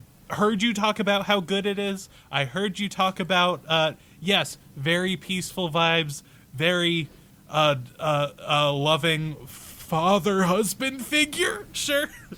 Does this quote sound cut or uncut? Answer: uncut